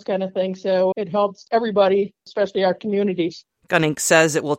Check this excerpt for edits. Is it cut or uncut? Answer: cut